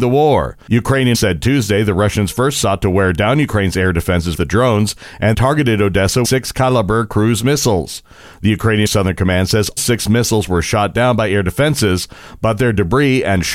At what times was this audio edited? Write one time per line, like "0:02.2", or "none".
0:01.1
0:04.3
0:05.3
0:06.2
0:08.9
0:09.8